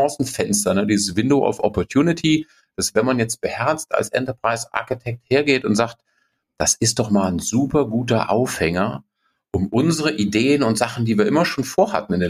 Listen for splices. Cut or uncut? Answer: uncut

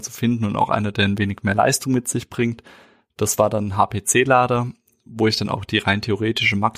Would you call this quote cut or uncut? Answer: uncut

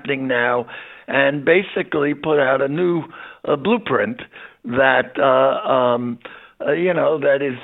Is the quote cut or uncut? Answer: uncut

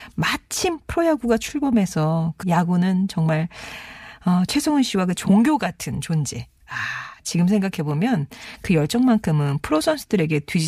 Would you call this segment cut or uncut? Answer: cut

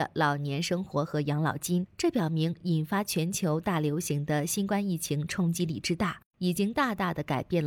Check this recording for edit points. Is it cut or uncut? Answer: cut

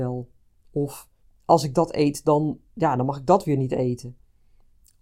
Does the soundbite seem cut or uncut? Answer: cut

